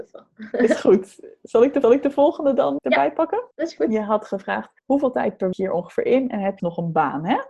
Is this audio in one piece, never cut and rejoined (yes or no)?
no